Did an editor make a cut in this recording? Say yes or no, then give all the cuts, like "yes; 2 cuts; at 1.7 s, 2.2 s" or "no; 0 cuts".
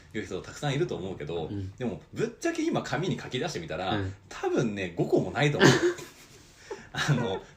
no; 0 cuts